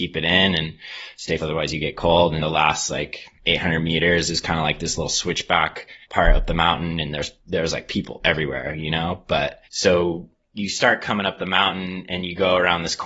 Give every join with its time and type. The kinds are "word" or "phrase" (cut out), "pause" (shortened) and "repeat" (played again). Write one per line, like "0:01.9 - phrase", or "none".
0:01.4 - word
0:02.4 - word
0:03.3 - pause
0:06.0 - pause
0:07.4 - pause
0:09.6 - pause